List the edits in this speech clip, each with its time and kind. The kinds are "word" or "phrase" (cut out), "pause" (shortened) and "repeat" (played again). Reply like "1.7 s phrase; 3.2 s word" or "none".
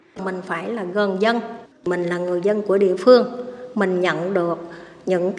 none